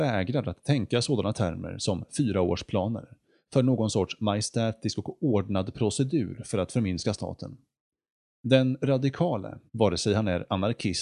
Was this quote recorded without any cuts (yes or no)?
no